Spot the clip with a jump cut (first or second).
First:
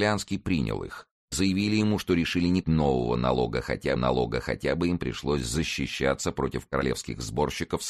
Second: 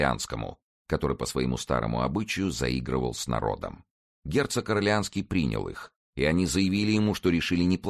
first